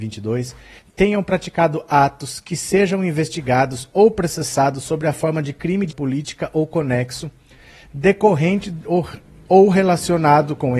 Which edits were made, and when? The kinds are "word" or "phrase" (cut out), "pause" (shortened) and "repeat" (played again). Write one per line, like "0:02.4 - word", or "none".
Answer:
0:05.9 - word